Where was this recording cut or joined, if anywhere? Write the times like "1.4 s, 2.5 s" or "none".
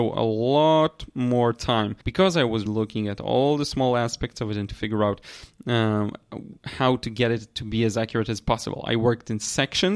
2.0 s, 2.7 s, 4.7 s, 6.6 s